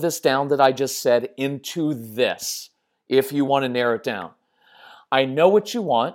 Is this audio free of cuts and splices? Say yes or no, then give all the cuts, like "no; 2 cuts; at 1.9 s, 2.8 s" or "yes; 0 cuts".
yes; 0 cuts